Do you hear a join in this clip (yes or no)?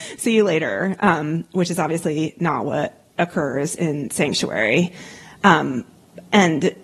no